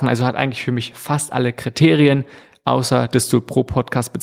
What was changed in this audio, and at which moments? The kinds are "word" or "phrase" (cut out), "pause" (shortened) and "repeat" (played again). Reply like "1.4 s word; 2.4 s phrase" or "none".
none